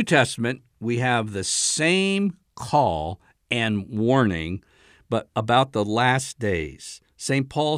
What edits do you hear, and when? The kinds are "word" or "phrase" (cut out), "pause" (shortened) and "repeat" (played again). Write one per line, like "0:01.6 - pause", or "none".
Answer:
none